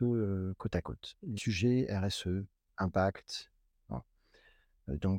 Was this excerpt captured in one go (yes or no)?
no